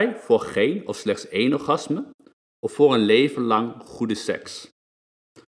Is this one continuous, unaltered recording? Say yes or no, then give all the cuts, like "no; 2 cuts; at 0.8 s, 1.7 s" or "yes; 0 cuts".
yes; 0 cuts